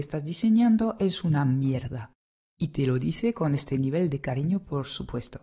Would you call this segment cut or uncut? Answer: uncut